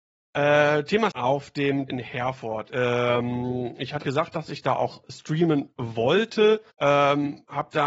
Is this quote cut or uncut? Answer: cut